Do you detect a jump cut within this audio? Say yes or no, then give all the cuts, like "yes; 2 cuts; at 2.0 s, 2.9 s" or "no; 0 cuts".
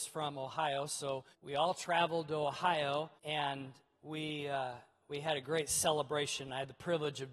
yes; 2 cuts; at 1.3 s, 3.2 s